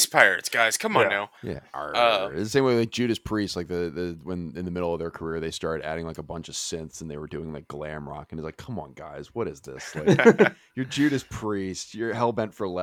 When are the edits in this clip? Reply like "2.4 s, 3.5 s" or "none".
1.4 s